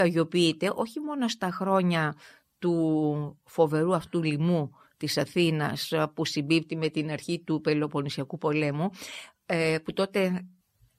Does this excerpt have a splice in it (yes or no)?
no